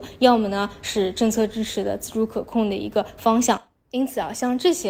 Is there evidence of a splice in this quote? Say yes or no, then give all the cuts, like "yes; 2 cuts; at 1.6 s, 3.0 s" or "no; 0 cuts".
no; 0 cuts